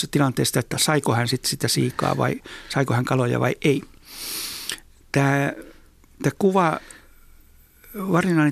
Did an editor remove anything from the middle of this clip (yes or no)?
no